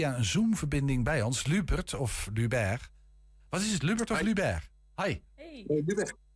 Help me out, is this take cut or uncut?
uncut